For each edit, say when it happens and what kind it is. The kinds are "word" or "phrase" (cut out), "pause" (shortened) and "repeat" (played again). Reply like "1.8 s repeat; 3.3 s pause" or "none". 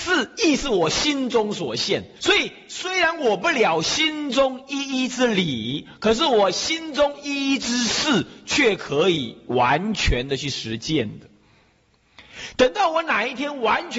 2.2 s pause